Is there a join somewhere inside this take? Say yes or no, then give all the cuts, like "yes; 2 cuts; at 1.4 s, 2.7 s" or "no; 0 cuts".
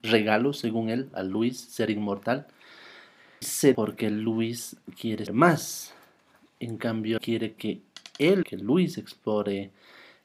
yes; 6 cuts; at 1.1 s, 3.4 s, 3.7 s, 5.3 s, 7.2 s, 8.4 s